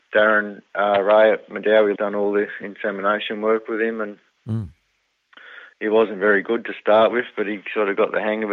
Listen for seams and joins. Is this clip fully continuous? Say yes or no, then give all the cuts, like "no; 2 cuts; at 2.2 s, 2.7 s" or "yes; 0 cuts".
no; 1 cut; at 2.0 s